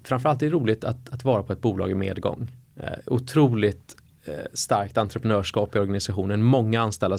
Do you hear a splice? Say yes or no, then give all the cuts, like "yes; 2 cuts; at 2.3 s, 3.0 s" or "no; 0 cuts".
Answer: no; 0 cuts